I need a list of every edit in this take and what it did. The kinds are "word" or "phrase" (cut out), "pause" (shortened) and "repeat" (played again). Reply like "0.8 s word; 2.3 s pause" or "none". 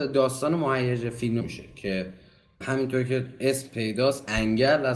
1.4 s phrase; 2.6 s word